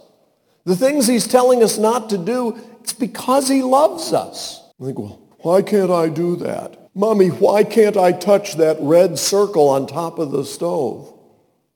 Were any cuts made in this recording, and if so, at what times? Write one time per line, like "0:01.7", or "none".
0:04.7
0:05.3
0:06.9